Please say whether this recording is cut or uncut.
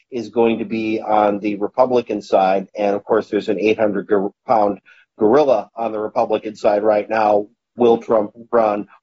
uncut